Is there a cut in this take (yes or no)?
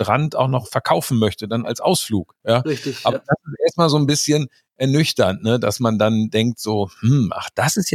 no